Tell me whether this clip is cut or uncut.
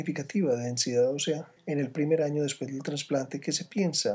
cut